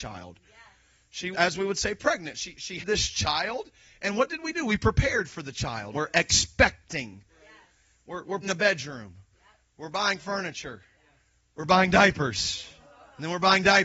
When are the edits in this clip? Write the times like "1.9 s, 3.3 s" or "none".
1.3 s, 2.8 s, 5.9 s, 8.4 s

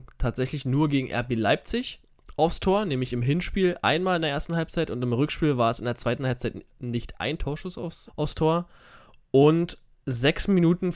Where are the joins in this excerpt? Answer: 8.1 s

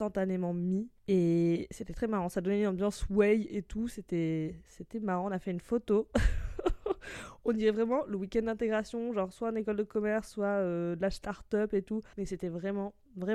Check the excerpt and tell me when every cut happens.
1.0 s, 12.1 s

